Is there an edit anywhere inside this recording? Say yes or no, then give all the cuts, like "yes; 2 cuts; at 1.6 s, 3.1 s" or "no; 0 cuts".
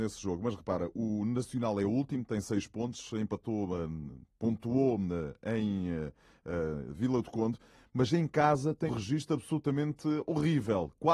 yes; 1 cut; at 8.9 s